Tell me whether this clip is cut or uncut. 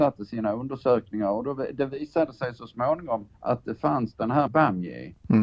cut